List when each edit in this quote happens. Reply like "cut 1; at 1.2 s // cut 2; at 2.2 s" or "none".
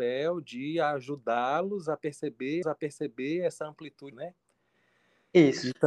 cut 1; at 2.6 s // cut 2; at 4.1 s